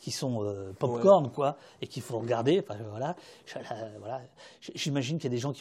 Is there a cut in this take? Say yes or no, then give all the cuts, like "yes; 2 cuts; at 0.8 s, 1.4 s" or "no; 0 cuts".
no; 0 cuts